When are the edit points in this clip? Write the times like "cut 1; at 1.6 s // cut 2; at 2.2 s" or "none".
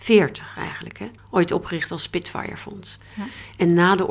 cut 1; at 1.2 s